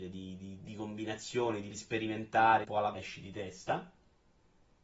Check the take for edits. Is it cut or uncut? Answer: cut